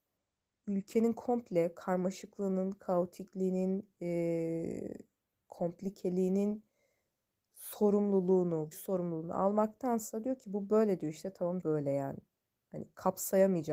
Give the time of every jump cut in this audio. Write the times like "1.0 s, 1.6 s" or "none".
8.7 s, 11.6 s